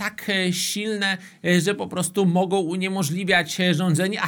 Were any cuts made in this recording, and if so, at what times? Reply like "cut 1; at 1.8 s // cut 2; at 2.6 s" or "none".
none